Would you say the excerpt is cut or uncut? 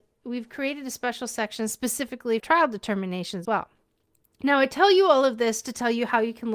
cut